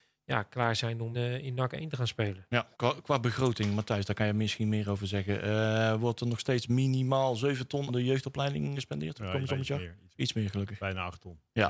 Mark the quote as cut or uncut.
cut